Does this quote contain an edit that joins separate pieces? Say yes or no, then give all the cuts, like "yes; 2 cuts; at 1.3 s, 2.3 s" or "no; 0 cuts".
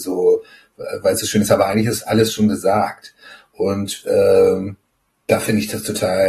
no; 0 cuts